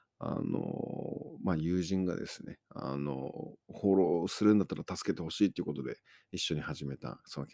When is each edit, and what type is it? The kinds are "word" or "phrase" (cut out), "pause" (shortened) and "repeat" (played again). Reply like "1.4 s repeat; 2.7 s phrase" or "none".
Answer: 3.6 s pause